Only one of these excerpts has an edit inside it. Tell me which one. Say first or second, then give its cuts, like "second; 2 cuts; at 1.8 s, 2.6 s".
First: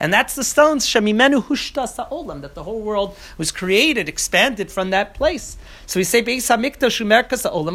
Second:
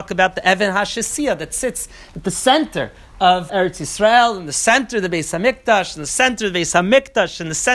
second; 1 cut; at 3.5 s